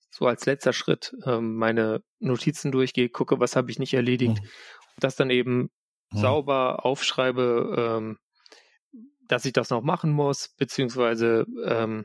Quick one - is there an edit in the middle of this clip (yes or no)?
no